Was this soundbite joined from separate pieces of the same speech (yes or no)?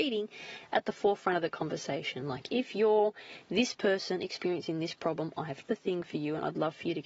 yes